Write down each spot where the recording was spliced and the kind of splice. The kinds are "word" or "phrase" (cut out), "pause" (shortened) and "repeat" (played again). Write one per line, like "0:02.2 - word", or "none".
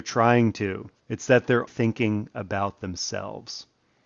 0:01.0 - pause
0:01.7 - word

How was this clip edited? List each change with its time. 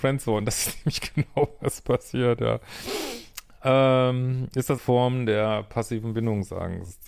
0:04.8 - word

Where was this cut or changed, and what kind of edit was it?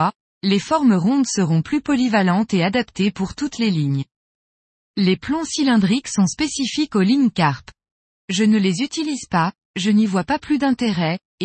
none

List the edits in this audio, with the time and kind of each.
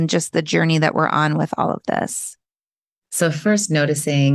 none

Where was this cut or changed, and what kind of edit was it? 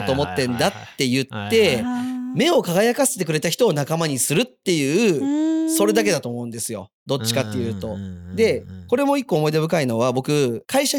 0:07.0 - pause

